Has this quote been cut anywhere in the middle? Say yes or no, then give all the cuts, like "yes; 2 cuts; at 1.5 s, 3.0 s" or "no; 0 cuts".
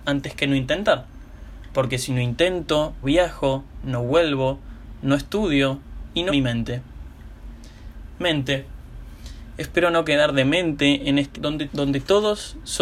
yes; 4 cuts; at 3.0 s, 6.3 s, 11.3 s, 11.7 s